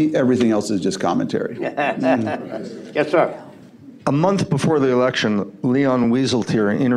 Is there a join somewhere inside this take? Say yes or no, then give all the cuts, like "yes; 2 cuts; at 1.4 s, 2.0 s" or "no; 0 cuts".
no; 0 cuts